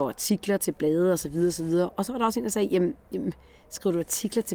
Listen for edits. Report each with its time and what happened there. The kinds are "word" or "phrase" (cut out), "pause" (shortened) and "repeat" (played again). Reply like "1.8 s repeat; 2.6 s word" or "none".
none